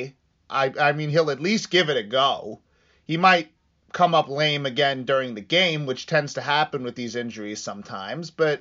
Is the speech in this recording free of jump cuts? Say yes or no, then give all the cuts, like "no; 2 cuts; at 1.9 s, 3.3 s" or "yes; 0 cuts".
yes; 0 cuts